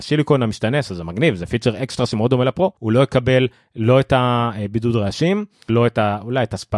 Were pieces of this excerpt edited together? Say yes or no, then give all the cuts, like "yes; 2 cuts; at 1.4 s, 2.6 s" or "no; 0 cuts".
yes; 2 cuts; at 2.8 s, 5.7 s